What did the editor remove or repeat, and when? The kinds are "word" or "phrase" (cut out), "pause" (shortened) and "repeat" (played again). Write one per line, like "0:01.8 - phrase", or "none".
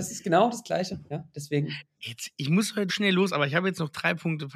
0:02.9 - word